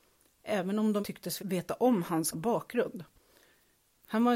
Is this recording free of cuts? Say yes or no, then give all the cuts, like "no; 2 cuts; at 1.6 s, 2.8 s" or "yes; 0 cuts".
no; 3 cuts; at 1.0 s, 1.4 s, 2.3 s